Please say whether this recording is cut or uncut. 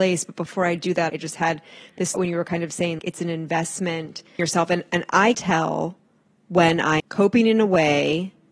cut